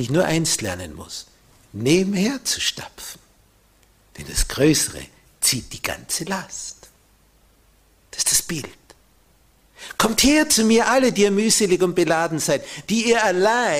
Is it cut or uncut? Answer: uncut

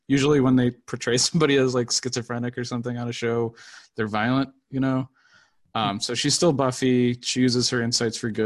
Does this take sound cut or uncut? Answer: uncut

